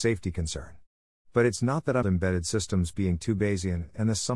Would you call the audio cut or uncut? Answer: cut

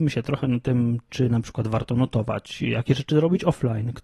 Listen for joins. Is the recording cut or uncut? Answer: uncut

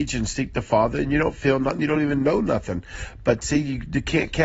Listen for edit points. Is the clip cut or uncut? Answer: uncut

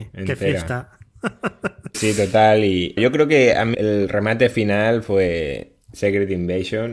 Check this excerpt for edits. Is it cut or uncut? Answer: cut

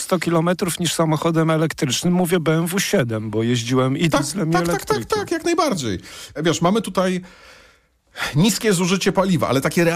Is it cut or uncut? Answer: uncut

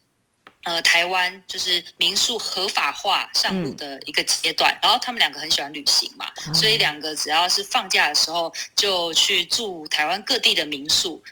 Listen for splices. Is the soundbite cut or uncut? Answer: cut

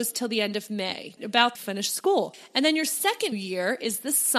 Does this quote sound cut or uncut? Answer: cut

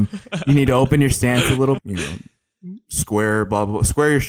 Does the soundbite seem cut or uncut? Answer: cut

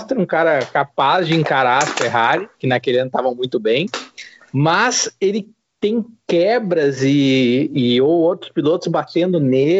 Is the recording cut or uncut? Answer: cut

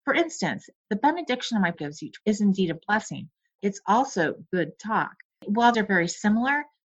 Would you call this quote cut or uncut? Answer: cut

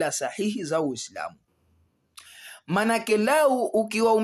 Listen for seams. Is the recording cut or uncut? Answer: uncut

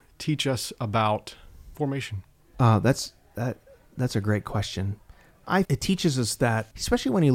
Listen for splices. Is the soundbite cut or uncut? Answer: cut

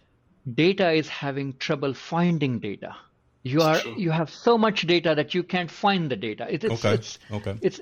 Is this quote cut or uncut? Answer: cut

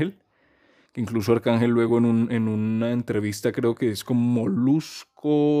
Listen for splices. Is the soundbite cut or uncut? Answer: uncut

